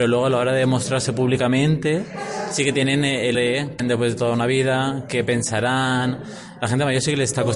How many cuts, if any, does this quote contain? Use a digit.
2